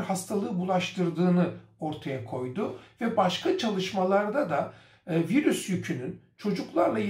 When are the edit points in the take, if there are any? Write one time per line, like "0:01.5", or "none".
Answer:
none

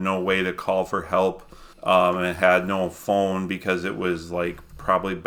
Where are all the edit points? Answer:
0:01.7

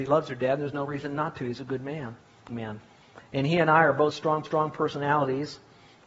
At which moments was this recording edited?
0:02.5
0:04.4

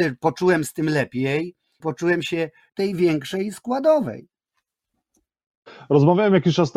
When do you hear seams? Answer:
0:01.8
0:02.7

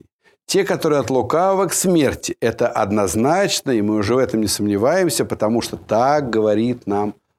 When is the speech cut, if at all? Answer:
none

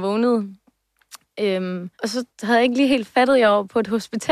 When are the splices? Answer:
0:01.9
0:02.3

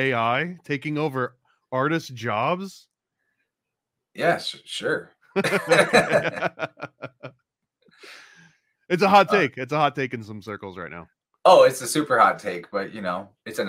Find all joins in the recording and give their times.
none

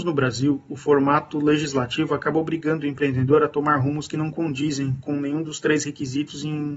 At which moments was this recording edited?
none

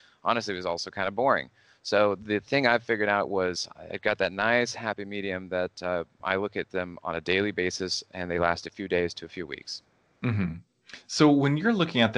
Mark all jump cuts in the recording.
none

